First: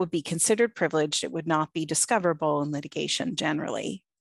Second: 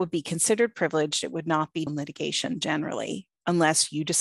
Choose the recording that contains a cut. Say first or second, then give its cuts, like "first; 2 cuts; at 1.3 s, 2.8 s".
second; 1 cut; at 1.9 s